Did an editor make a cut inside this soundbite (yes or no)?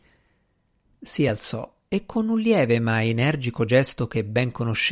no